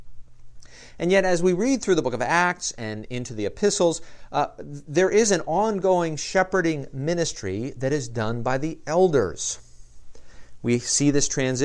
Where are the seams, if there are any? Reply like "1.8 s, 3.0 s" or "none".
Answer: none